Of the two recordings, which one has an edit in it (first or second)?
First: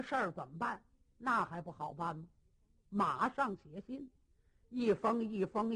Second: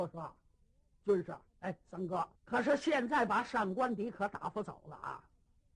second